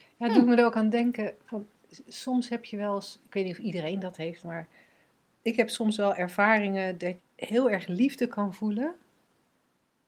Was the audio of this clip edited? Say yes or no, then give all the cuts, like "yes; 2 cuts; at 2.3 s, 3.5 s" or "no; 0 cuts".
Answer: yes; 1 cut; at 7.2 s